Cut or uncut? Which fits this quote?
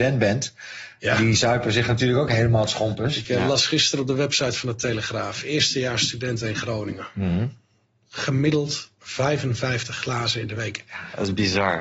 uncut